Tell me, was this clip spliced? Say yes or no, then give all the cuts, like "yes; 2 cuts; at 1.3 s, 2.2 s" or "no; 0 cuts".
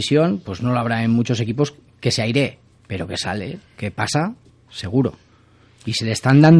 no; 0 cuts